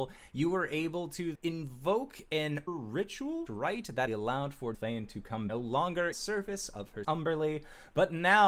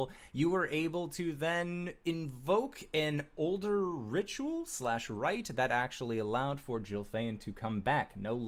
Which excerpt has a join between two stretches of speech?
first; 8 cuts; at 1.3 s, 2.7 s, 3.5 s, 4.1 s, 4.7 s, 5.5 s, 6.1 s, 7.0 s

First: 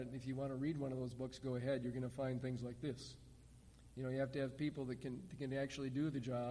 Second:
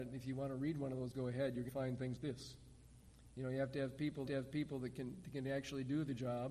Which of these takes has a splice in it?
second; 4 cuts; at 1.1 s, 1.7 s, 2.2 s, 4.3 s

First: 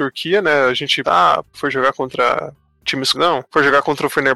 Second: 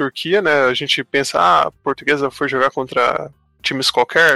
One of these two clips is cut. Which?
first; 3 cuts; at 1.0 s, 1.5 s, 3.1 s

